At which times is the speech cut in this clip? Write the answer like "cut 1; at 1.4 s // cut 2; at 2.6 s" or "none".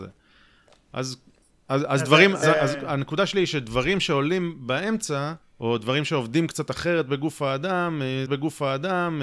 cut 1; at 1.4 s // cut 2; at 2.4 s // cut 3; at 5.4 s // cut 4; at 8.3 s

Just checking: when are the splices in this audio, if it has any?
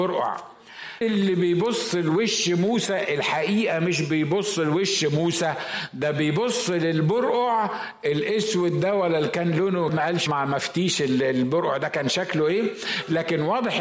cut 1; at 1.0 s // cut 2; at 9.9 s // cut 3; at 10.3 s

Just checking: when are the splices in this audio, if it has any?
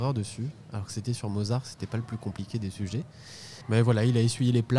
cut 1; at 3.6 s

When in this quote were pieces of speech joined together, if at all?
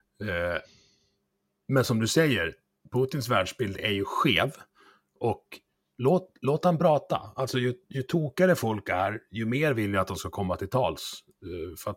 none

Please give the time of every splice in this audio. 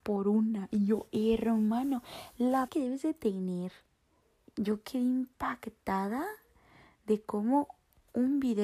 cut 1; at 2.7 s // cut 2; at 4.2 s

